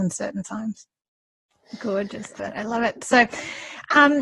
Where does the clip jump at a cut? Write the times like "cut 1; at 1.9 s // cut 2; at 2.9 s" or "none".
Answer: cut 1; at 2.4 s